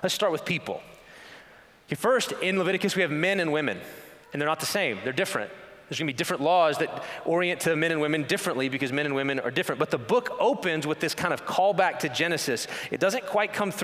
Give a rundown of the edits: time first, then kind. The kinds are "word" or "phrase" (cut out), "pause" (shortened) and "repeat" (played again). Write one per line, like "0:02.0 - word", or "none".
0:04.2 - pause